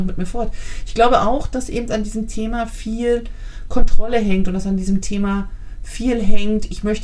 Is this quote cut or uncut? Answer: uncut